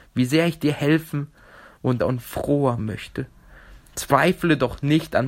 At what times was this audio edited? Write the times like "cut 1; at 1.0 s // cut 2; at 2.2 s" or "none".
cut 1; at 2.0 s // cut 2; at 2.8 s